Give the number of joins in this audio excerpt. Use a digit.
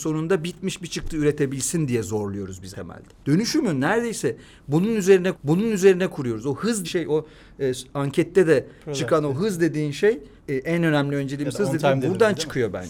4